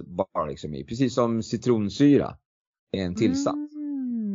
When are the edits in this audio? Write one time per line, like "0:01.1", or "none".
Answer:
none